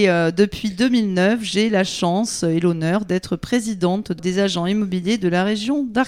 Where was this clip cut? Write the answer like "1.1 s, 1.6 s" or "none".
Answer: 4.2 s